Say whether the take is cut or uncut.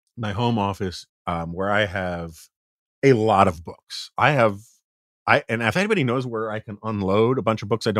cut